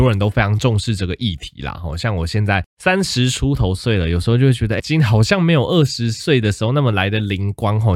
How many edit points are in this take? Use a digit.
2